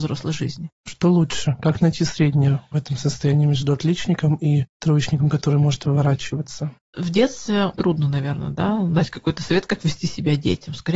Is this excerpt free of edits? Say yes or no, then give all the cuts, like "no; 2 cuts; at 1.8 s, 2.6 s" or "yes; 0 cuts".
no; 1 cut; at 7.7 s